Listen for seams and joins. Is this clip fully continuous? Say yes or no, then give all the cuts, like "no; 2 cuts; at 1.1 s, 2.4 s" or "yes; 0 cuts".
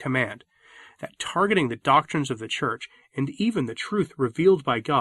yes; 0 cuts